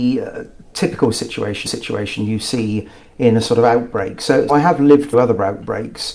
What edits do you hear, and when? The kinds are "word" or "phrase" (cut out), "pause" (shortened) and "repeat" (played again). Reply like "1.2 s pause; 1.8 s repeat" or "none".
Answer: 1.7 s repeat; 4.5 s word; 5.1 s word